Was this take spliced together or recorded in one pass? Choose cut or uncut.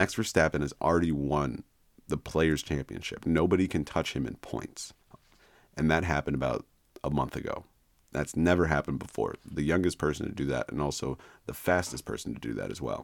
uncut